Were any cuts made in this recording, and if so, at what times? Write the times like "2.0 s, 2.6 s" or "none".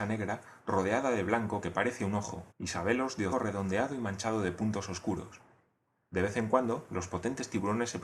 2.5 s, 3.3 s